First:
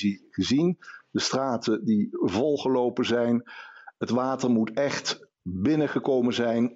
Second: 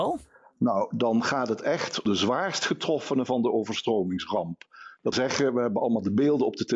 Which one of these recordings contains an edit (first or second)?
second